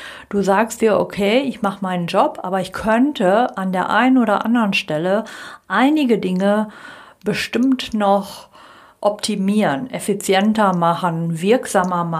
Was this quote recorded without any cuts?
yes; 0 cuts

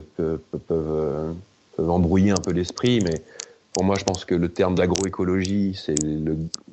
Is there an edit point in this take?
no; 0 cuts

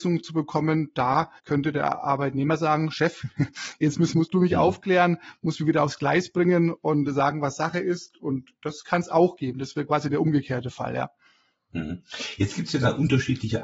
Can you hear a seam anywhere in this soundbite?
yes; 2 cuts; at 1.4 s, 4.1 s

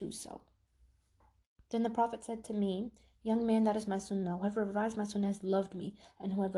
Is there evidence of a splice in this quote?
no; 0 cuts

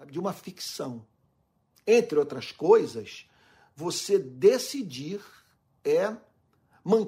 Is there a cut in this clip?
no; 0 cuts

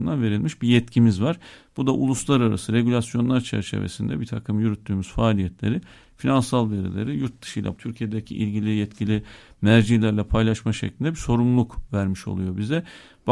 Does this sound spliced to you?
yes; 1 cut; at 7.7 s

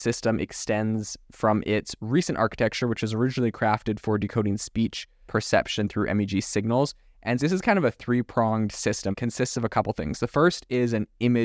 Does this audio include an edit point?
yes; 4 cuts; at 1.2 s, 5.3 s, 7.4 s, 9.1 s

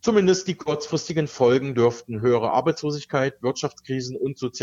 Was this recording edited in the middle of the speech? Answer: no; 0 cuts

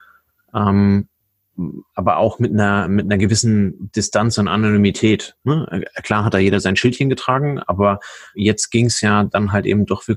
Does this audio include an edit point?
yes; 1 cut; at 8.3 s

